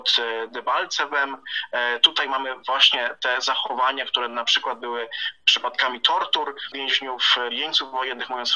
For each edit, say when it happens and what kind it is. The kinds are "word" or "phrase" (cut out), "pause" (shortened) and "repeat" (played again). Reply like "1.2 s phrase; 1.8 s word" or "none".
7.5 s word